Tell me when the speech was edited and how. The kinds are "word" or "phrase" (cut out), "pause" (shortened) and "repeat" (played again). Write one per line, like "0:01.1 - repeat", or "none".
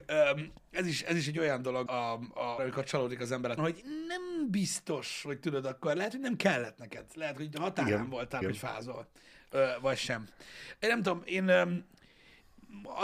0:01.9 - word
0:02.6 - word
0:03.6 - word
0:08.4 - word